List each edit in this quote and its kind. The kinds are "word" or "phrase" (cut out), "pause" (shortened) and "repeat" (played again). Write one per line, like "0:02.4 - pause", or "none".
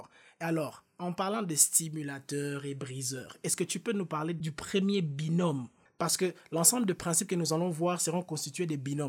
none